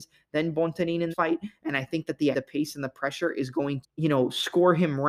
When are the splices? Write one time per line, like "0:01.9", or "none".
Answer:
0:01.1
0:02.3
0:03.8